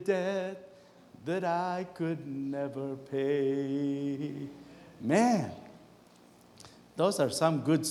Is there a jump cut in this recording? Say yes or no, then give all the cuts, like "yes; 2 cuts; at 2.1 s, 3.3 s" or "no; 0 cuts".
no; 0 cuts